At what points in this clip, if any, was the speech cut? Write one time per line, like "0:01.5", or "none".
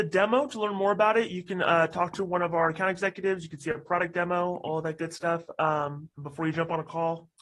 0:06.1